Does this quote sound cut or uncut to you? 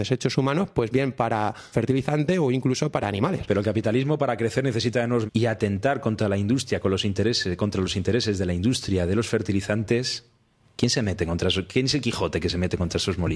cut